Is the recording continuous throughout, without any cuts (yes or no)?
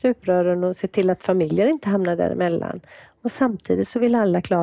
yes